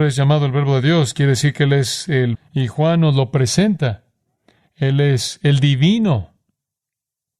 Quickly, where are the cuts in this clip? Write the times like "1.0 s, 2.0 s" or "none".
2.3 s